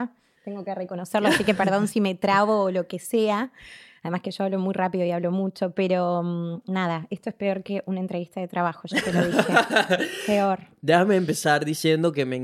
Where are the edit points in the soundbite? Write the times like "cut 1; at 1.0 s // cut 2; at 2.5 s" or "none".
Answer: none